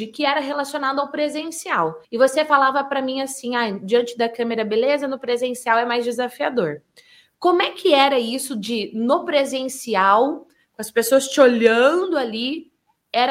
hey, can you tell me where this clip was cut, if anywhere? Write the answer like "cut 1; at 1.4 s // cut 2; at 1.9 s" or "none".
cut 1; at 2.0 s